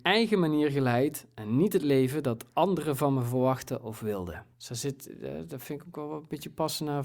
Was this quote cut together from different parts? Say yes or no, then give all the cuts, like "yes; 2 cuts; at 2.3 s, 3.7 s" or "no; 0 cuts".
yes; 1 cut; at 4.5 s